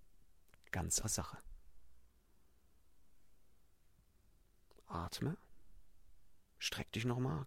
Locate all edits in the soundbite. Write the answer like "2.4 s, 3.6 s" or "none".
1.0 s